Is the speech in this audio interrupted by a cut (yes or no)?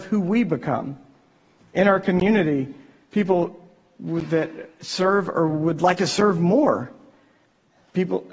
no